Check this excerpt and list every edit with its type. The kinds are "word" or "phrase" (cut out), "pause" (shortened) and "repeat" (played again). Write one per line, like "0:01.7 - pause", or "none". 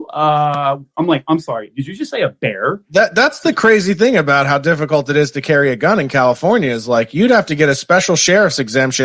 none